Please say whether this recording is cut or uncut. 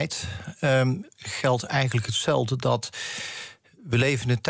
uncut